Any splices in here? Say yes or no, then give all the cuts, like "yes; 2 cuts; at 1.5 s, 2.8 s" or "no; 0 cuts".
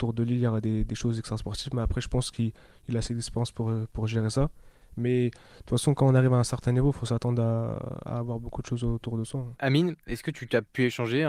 no; 0 cuts